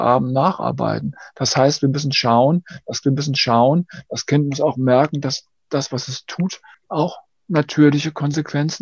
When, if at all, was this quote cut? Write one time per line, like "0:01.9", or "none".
0:03.0
0:06.7